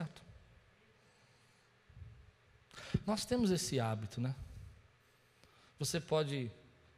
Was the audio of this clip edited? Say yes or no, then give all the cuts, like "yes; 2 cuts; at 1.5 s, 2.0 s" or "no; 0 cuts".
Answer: no; 0 cuts